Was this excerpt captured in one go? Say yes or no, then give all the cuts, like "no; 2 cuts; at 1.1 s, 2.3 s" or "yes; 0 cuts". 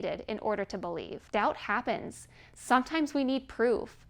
no; 1 cut; at 1.3 s